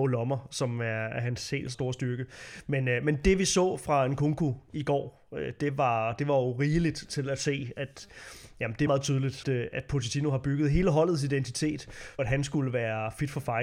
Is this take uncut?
no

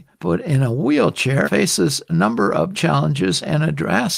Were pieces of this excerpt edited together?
yes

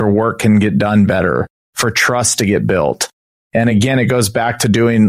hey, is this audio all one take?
yes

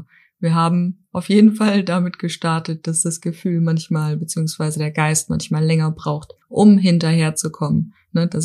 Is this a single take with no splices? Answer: no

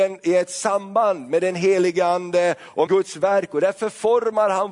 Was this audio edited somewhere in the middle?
yes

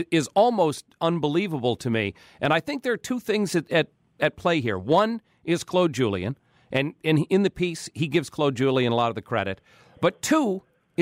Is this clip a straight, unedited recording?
yes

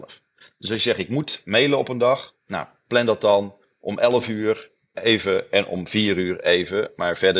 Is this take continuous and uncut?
yes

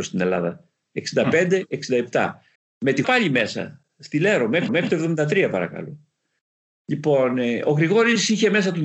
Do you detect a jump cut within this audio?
yes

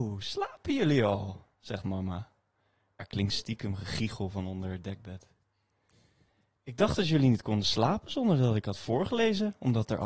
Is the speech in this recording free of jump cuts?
yes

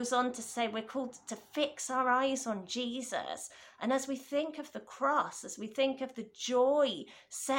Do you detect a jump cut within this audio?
no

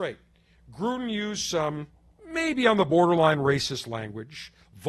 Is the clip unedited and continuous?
yes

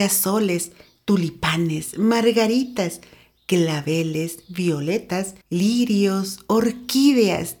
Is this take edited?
yes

